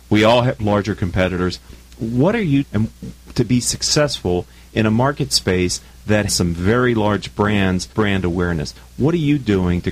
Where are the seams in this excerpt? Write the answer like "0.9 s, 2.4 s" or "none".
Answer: 2.6 s, 6.3 s, 7.9 s